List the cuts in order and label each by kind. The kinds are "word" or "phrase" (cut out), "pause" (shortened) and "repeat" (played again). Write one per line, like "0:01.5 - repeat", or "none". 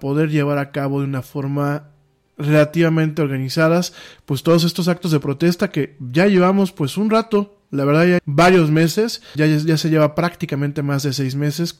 0:08.2 - word
0:09.3 - word